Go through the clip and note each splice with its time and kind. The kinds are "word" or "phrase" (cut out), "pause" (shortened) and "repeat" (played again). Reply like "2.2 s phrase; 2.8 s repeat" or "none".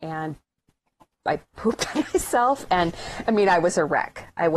none